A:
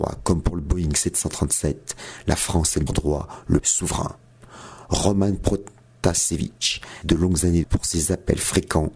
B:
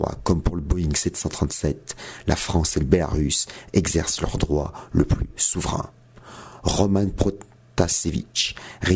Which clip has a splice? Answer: A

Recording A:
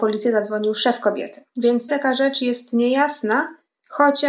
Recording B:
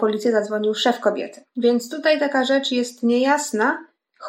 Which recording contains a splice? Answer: A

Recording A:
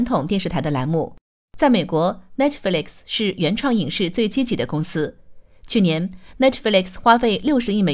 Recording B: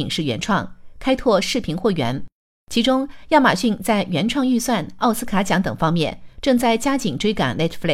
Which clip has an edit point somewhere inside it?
B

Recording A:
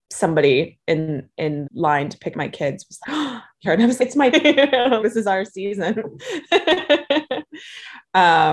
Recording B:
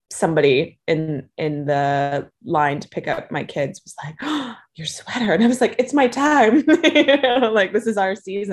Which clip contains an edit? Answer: A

